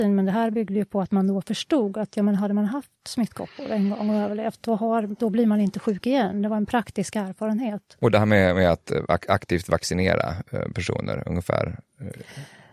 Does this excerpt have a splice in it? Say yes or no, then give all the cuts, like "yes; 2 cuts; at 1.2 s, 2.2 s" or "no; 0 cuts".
no; 0 cuts